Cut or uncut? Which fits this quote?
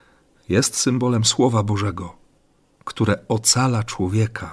uncut